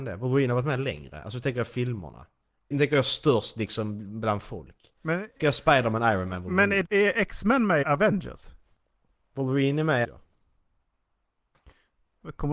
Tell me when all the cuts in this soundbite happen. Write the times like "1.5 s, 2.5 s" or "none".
2.7 s, 5.4 s, 6.8 s, 7.8 s, 10.0 s